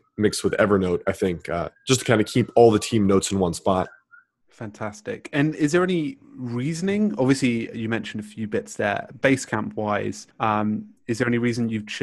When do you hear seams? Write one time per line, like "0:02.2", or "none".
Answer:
0:01.8
0:10.3